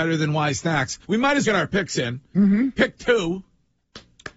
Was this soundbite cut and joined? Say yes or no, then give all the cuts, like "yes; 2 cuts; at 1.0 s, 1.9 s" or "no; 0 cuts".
yes; 2 cuts; at 1.0 s, 1.4 s